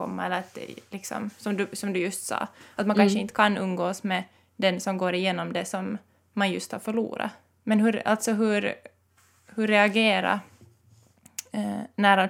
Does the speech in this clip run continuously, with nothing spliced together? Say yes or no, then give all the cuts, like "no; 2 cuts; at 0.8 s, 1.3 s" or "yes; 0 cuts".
yes; 0 cuts